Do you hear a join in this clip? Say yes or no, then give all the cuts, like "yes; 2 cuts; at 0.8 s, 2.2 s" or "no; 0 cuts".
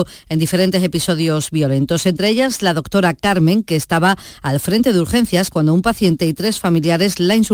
no; 0 cuts